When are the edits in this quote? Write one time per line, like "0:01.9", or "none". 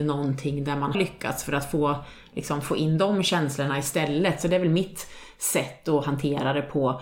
0:00.9